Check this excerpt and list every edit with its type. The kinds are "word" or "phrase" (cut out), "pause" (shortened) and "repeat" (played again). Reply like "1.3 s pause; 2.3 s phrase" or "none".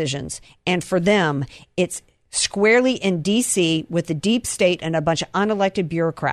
none